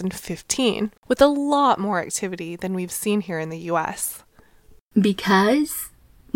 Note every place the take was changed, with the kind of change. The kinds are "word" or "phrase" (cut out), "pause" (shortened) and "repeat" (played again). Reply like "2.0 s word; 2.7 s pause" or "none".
1.0 s pause